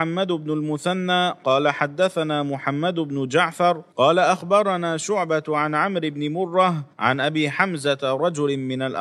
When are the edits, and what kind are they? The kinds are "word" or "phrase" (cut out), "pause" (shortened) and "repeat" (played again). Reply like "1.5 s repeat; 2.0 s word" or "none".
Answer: 3.9 s pause; 6.9 s pause